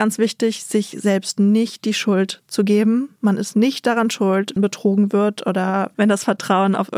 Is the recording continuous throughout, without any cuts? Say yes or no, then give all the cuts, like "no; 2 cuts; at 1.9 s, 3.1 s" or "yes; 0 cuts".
no; 1 cut; at 4.6 s